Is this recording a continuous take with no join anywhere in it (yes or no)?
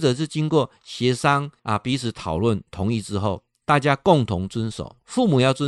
no